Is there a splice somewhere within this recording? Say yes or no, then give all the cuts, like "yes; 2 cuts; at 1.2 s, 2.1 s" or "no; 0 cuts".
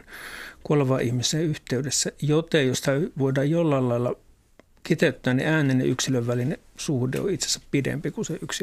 no; 0 cuts